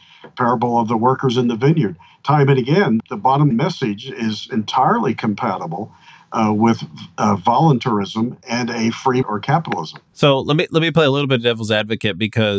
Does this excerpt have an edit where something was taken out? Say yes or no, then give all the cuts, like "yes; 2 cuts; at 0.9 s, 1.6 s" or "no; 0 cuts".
yes; 3 cuts; at 3.0 s, 3.5 s, 9.2 s